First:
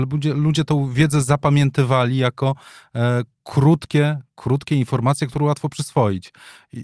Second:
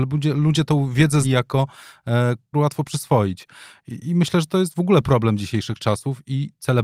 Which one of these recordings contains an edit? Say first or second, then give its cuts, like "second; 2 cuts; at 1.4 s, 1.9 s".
second; 2 cuts; at 1.2 s, 2.5 s